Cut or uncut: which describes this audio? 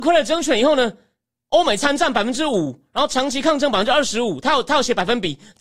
uncut